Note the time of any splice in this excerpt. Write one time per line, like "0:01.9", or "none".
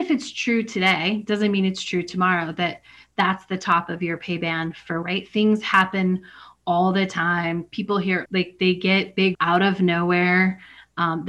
0:05.0
0:08.2
0:09.3